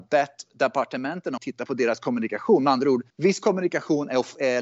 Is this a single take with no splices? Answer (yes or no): no